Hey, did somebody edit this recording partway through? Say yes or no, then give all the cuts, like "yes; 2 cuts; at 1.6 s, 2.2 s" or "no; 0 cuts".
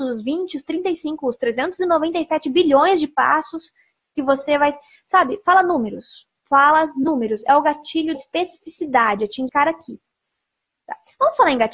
yes; 2 cuts; at 8.1 s, 9.5 s